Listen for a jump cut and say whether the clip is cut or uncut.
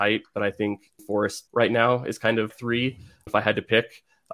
cut